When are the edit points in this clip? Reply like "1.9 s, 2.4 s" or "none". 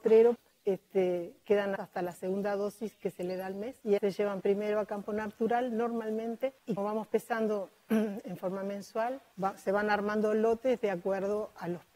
1.8 s, 4.0 s, 6.8 s